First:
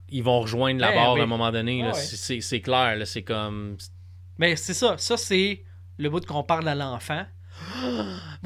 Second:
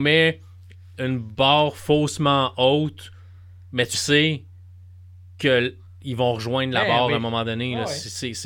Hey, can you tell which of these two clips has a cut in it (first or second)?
second